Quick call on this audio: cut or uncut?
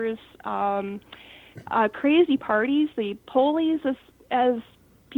uncut